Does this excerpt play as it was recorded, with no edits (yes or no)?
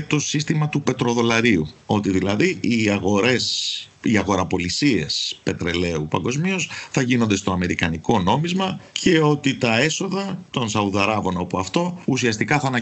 yes